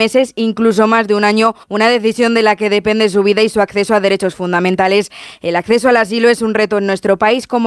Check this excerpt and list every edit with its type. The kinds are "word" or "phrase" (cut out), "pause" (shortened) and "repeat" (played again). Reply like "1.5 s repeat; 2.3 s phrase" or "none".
1.6 s pause